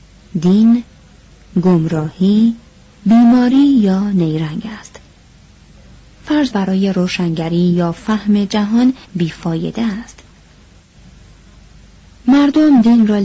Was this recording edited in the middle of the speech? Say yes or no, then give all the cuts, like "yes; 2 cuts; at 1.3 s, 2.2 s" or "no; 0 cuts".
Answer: yes; 2 cuts; at 6.5 s, 9.0 s